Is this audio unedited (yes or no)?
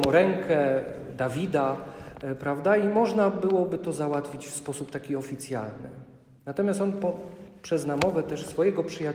yes